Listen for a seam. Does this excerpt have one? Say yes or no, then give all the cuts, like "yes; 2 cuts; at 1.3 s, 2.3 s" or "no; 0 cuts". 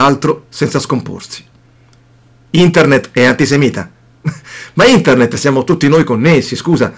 no; 0 cuts